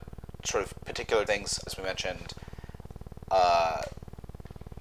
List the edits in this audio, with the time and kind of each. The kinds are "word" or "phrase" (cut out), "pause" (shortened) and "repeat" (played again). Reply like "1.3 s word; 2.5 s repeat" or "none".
1.3 s word; 1.7 s word